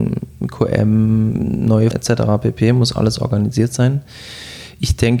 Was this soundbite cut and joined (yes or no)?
yes